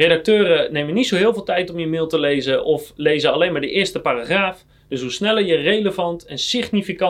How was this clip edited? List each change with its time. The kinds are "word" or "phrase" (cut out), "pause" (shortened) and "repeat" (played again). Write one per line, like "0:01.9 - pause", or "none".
none